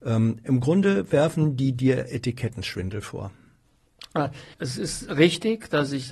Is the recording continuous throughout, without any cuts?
no; 1 cut; at 4.5 s

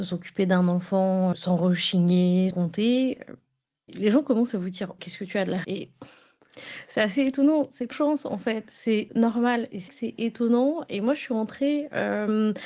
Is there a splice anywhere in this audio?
yes; 8 cuts; at 1.3 s, 2.5 s, 3.9 s, 5.0 s, 5.6 s, 7.9 s, 9.1 s, 9.9 s

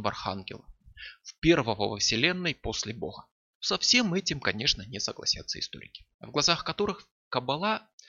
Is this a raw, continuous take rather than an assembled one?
yes; 0 cuts

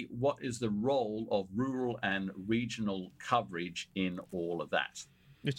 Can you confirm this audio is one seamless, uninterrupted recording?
yes; 0 cuts

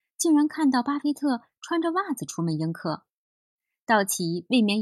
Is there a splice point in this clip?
no; 0 cuts

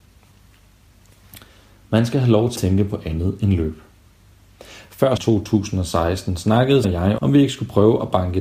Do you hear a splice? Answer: yes; 4 cuts; at 2.6 s, 5.2 s, 6.8 s, 7.2 s

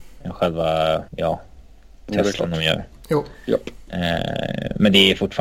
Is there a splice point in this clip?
yes; 1 cut; at 1.1 s

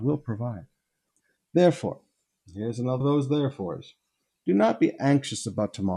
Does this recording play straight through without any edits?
no; 1 cut; at 3.0 s

